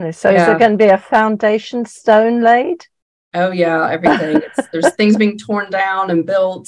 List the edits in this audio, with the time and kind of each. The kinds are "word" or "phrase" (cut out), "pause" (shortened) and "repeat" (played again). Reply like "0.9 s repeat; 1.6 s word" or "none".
none